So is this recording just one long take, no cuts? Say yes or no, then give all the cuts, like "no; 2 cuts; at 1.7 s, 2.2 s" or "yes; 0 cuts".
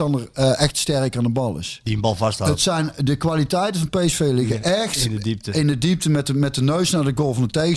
yes; 0 cuts